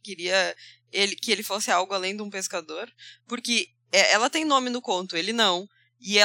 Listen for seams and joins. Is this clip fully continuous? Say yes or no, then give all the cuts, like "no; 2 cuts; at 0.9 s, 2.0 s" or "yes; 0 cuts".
yes; 0 cuts